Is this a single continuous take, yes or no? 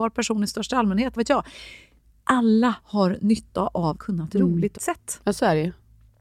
no